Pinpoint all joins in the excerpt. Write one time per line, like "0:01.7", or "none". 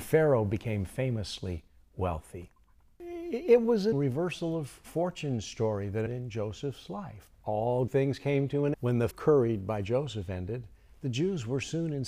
0:03.9
0:06.1
0:07.3
0:07.9
0:08.7
0:09.1